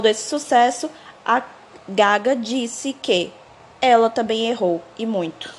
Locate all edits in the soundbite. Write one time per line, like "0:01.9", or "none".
none